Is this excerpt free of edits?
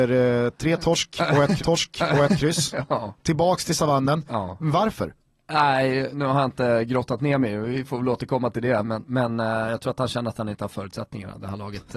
no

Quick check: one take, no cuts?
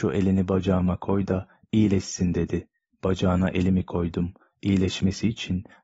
yes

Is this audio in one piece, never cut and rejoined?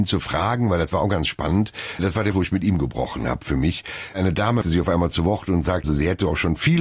no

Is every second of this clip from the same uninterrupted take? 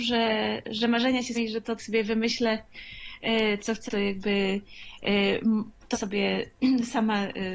no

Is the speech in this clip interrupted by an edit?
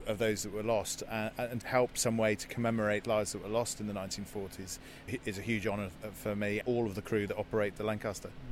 yes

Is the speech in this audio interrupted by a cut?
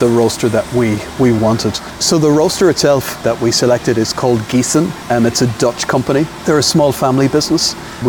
no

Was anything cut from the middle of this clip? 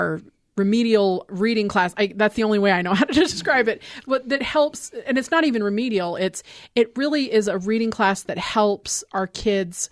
no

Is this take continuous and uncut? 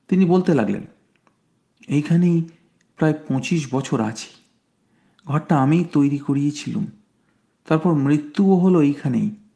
yes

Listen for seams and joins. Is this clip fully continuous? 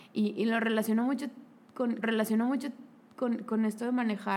no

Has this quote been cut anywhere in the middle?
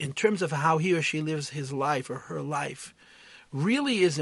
no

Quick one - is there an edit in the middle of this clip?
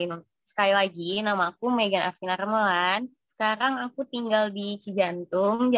yes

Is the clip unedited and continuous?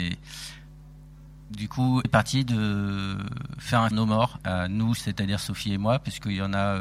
no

